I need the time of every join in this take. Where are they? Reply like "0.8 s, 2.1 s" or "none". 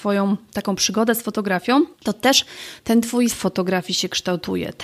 1.9 s, 3.3 s